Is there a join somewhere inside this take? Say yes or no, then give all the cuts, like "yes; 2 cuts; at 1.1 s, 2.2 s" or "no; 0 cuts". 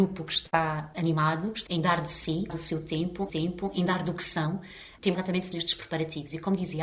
yes; 5 cuts; at 1.7 s, 2.5 s, 3.3 s, 5.1 s, 5.5 s